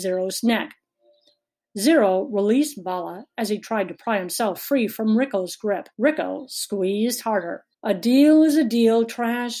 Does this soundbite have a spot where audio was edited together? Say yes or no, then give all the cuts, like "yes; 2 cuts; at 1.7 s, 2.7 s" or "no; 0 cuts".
yes; 2 cuts; at 5.9 s, 7.7 s